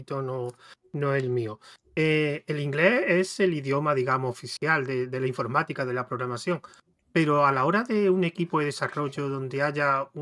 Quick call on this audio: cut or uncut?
uncut